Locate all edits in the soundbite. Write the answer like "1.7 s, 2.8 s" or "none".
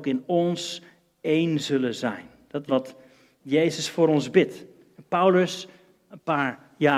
2.7 s